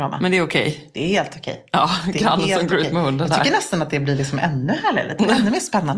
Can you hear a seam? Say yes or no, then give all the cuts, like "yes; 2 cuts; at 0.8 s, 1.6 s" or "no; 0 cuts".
no; 0 cuts